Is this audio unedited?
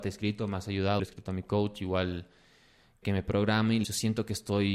no; 3 cuts; at 1.0 s, 3.0 s, 3.8 s

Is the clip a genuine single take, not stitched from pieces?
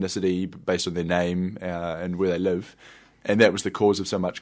yes; 0 cuts

